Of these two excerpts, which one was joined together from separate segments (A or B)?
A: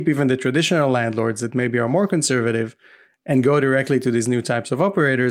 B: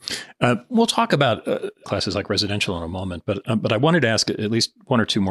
B